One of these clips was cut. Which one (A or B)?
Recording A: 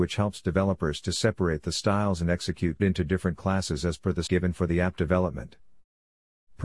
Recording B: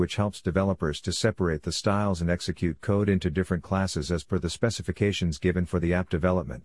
A